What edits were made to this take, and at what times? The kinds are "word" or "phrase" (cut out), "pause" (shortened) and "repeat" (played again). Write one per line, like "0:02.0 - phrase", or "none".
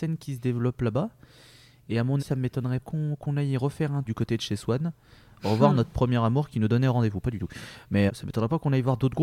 0:02.2 - word
0:02.8 - word
0:04.0 - word
0:08.1 - word